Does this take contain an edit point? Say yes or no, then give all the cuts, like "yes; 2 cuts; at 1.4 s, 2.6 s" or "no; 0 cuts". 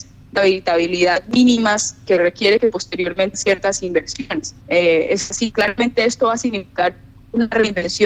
yes; 3 cuts; at 3.3 s, 4.6 s, 5.5 s